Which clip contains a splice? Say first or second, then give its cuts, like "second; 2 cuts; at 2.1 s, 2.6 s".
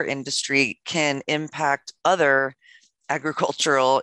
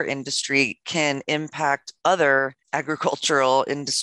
second; 1 cut; at 2.6 s